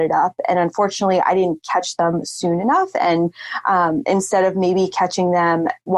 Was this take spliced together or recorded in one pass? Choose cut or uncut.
uncut